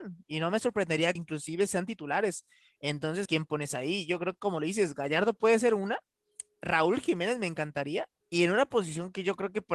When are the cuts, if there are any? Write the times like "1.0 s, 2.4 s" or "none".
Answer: 1.2 s, 3.3 s, 8.2 s